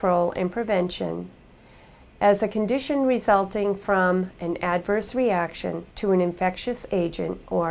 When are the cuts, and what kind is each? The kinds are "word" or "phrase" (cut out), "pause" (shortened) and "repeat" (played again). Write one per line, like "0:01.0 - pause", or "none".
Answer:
0:05.9 - pause

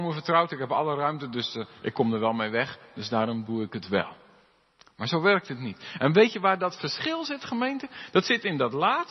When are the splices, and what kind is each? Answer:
none

